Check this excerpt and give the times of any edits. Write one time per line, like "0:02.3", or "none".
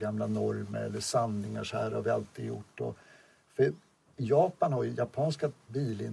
none